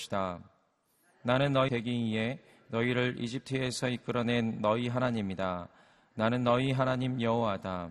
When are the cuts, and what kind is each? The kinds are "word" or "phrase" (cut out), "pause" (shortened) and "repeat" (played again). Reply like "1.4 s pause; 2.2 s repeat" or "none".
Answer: 1.7 s word